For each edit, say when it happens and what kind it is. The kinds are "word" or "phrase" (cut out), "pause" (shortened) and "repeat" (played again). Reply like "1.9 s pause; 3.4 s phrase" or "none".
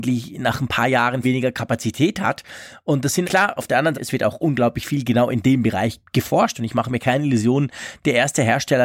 1.2 s word; 3.2 s word; 3.9 s word; 6.1 s pause